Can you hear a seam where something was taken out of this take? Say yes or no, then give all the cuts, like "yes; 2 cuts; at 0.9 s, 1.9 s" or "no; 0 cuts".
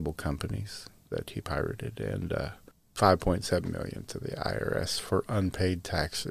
no; 0 cuts